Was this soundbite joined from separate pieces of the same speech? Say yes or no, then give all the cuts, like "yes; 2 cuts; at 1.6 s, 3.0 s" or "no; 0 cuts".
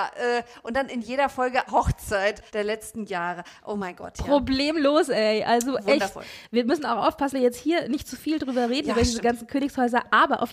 yes; 3 cuts; at 1.7 s, 2.5 s, 7.3 s